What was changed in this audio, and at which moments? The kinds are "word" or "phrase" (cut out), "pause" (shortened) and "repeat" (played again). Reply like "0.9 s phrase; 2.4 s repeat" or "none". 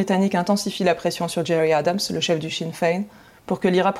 none